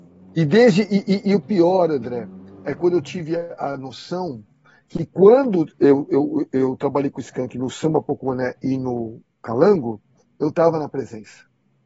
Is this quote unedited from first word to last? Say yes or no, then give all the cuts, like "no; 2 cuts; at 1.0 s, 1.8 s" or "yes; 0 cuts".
yes; 0 cuts